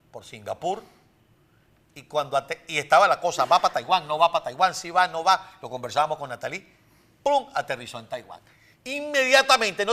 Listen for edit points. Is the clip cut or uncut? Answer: uncut